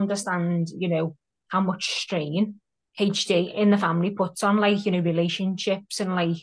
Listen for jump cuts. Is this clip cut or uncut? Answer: uncut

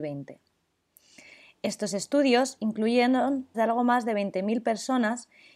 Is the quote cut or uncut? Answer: cut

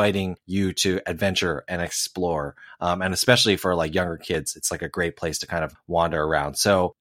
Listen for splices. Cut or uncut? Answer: uncut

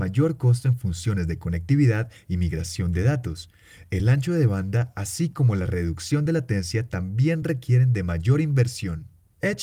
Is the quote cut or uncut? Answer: uncut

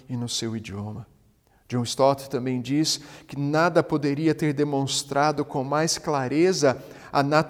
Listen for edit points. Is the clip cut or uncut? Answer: uncut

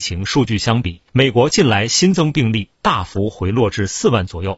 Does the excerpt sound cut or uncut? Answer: cut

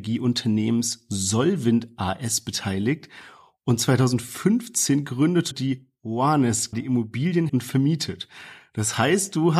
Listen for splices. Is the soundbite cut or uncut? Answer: cut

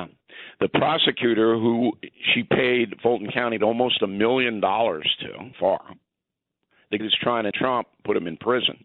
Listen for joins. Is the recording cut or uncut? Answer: cut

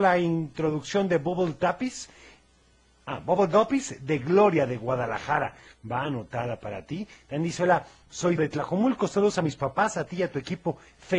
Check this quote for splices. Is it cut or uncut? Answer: cut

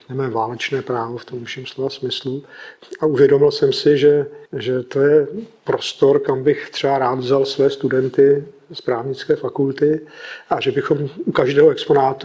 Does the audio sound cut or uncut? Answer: cut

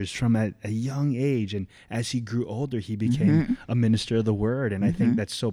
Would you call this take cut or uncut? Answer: uncut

